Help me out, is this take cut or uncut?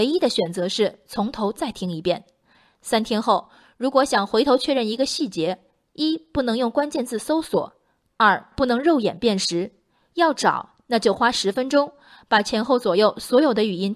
uncut